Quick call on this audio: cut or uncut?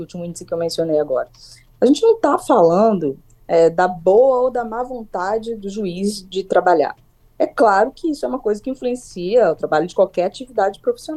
uncut